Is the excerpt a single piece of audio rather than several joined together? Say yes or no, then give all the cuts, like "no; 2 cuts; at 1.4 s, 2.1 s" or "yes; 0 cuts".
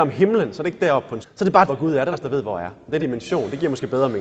no; 4 cuts; at 1.2 s, 1.7 s, 2.1 s, 3.0 s